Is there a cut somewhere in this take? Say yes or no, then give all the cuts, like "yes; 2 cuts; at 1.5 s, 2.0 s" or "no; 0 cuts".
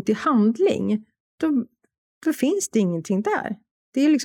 no; 0 cuts